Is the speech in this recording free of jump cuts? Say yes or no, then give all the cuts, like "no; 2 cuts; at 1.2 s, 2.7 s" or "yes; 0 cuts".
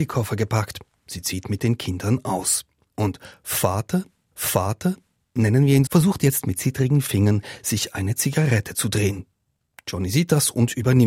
no; 2 cuts; at 4.3 s, 5.9 s